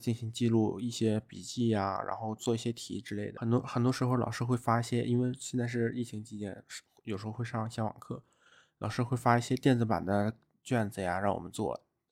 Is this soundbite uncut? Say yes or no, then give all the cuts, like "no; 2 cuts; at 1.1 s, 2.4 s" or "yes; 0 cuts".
yes; 0 cuts